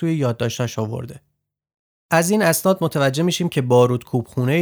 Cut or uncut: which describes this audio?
uncut